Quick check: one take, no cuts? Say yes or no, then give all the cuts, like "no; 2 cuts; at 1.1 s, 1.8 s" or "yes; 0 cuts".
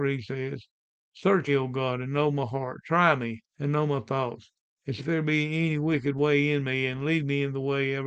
no; 3 cuts; at 1.5 s, 3.5 s, 5.0 s